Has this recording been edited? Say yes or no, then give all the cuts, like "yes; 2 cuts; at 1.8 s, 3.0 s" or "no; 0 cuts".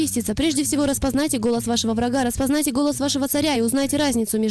no; 0 cuts